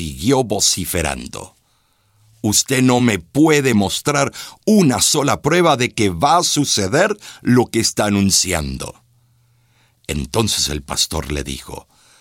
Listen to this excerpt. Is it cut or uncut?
uncut